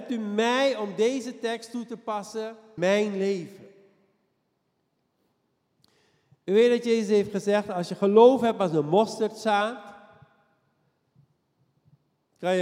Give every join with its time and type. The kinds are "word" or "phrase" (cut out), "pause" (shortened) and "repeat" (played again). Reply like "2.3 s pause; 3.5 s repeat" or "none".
2.8 s word